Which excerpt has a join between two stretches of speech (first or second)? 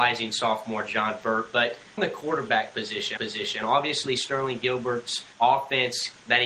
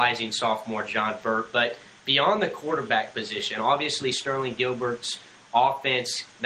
first